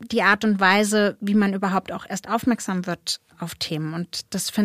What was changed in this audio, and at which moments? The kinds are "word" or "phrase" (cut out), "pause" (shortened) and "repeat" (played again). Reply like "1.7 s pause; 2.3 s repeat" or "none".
none